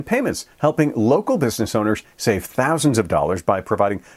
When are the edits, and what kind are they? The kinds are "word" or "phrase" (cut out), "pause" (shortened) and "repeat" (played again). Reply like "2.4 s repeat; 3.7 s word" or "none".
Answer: none